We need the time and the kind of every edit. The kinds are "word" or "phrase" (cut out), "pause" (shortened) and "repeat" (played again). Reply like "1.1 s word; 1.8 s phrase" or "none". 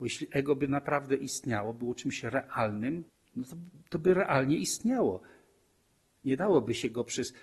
3.1 s pause

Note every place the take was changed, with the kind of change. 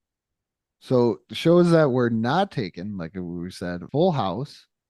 3.9 s pause

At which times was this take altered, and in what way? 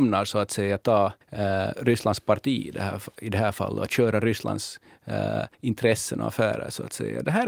1.2 s pause; 5.5 s pause

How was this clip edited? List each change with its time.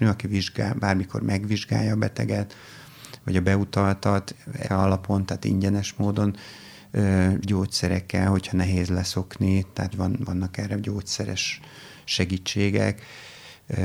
4.6 s word; 7.4 s word; 9.9 s word

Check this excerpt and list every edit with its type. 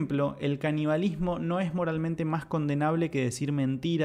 none

